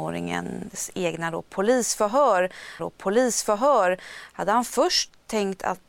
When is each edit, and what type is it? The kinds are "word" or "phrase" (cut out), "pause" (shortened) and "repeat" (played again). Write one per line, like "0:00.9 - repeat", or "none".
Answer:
0:02.8 - repeat